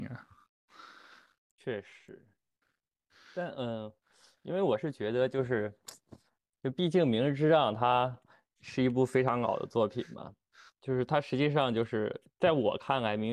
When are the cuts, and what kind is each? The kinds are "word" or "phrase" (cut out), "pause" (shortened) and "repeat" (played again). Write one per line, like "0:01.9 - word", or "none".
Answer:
none